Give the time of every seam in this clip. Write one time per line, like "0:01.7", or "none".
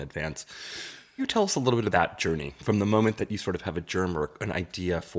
0:01.2
0:01.9